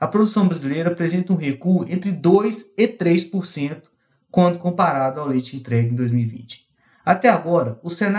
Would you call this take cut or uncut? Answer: uncut